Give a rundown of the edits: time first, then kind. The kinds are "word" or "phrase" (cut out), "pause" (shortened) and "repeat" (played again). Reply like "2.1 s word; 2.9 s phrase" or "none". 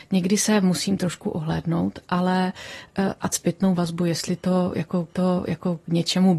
3.3 s phrase; 5.1 s repeat